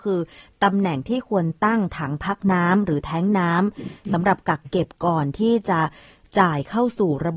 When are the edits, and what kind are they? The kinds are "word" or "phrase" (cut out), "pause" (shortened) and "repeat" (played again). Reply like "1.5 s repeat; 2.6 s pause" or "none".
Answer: none